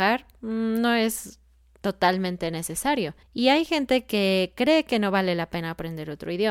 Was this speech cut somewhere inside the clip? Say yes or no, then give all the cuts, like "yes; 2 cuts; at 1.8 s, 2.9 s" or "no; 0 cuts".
yes; 2 cuts; at 1.8 s, 3.2 s